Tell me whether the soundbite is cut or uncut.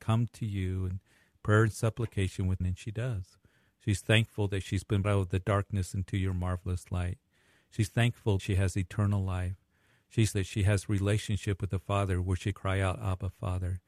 cut